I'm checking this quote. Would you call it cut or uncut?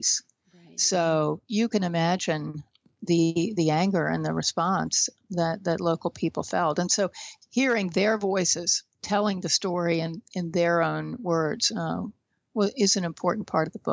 uncut